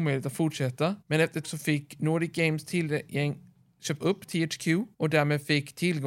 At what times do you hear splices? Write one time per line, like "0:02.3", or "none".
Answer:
0:01.0
0:01.4
0:04.0
0:04.9